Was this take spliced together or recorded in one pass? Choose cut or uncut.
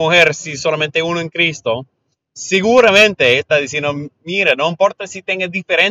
uncut